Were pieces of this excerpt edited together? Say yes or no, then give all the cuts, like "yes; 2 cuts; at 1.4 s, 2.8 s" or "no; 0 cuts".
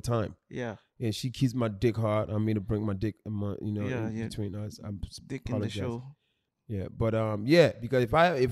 no; 0 cuts